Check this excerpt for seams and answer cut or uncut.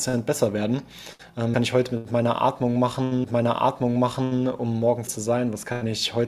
cut